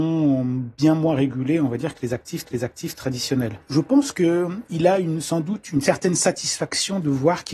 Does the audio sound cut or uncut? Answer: cut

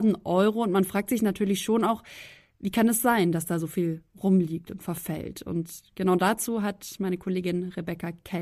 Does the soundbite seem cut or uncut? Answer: uncut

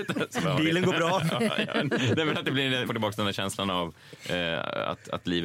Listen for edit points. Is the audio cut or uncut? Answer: cut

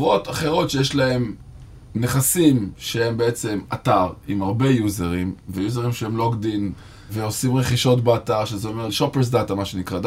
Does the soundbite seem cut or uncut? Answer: uncut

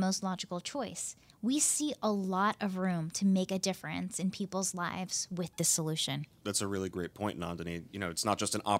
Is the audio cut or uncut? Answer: uncut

